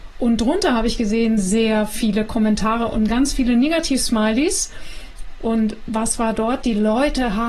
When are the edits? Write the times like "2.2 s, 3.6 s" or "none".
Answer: none